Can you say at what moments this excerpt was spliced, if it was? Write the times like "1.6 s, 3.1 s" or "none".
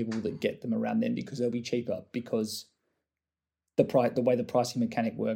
none